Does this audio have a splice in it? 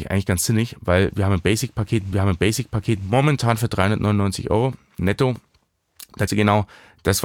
yes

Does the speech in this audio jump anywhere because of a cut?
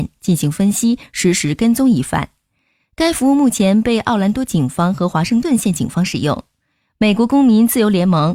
no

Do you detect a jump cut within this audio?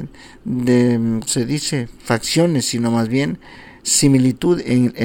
yes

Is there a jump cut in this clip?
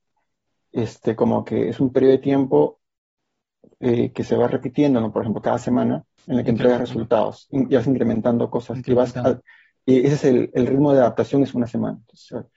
no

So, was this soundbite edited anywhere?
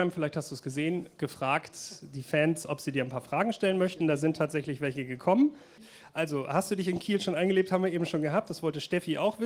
no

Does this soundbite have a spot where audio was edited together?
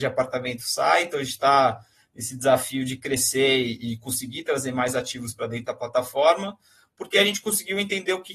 no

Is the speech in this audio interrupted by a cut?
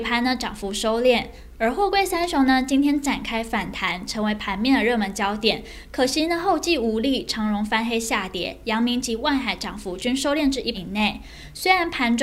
yes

